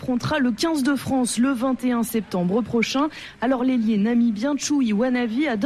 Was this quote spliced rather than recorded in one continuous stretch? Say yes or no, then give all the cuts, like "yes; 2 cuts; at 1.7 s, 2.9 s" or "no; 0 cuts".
no; 0 cuts